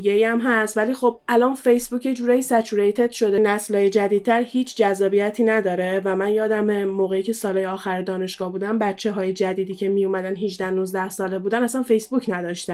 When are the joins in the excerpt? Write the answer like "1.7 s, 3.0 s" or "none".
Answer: 3.4 s